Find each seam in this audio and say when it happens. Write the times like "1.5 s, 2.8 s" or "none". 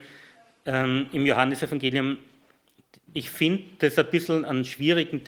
none

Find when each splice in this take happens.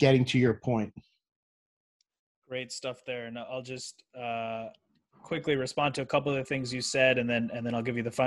none

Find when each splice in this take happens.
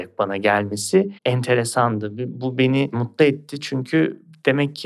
1.2 s

